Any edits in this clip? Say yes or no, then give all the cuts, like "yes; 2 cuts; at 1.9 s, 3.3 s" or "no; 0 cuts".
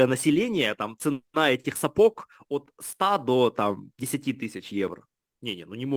no; 0 cuts